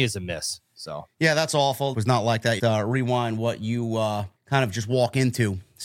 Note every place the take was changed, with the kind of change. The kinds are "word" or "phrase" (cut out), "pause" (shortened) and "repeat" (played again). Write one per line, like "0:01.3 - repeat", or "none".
0:01.9 - phrase
0:02.6 - phrase
0:04.4 - pause